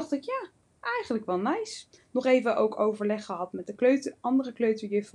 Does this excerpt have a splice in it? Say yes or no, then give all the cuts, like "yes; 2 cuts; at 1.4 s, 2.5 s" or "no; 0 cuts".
no; 0 cuts